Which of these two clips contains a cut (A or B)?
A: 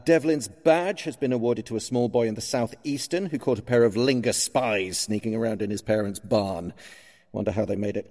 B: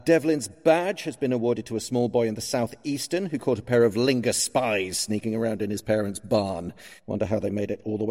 B